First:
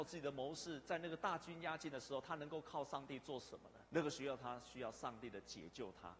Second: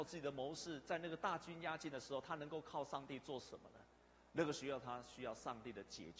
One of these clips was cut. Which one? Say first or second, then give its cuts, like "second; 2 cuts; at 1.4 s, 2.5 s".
first; 1 cut; at 3.9 s